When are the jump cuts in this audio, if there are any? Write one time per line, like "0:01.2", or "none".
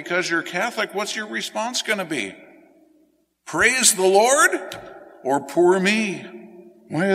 none